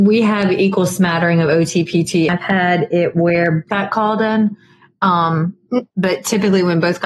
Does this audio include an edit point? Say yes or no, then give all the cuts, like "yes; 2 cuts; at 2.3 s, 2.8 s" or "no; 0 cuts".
yes; 3 cuts; at 2.3 s, 3.7 s, 5.9 s